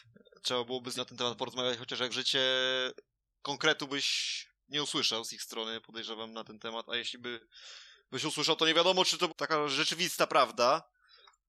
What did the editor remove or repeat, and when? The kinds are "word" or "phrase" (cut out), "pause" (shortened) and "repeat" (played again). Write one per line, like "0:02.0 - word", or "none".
0:01.0 - word
0:02.1 - word
0:09.3 - word